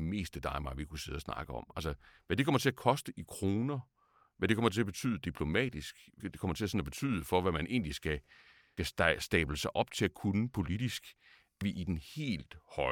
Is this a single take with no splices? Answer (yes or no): no